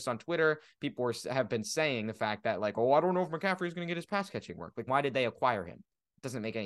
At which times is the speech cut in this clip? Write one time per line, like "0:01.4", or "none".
0:04.9